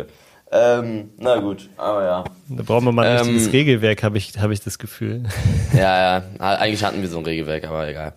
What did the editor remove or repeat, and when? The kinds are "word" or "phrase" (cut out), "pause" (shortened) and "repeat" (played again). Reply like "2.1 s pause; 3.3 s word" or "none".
none